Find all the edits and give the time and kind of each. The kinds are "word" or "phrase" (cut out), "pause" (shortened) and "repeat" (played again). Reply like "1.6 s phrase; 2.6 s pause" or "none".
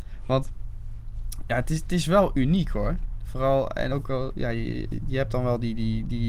3.9 s phrase